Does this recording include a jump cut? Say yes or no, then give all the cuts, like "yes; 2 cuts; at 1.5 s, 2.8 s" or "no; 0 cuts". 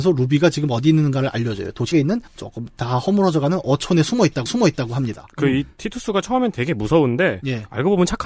yes; 3 cuts; at 1.9 s, 2.3 s, 4.5 s